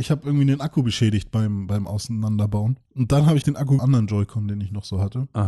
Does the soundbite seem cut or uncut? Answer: cut